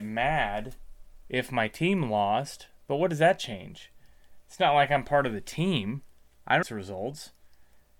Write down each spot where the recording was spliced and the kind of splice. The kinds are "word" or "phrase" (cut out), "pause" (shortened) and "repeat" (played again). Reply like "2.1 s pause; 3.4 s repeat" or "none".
6.6 s word